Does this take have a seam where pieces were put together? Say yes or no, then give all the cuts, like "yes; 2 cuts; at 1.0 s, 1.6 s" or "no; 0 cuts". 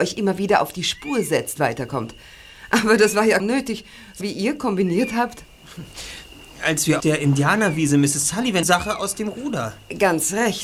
yes; 5 cuts; at 1.6 s, 3.4 s, 4.2 s, 7.0 s, 8.6 s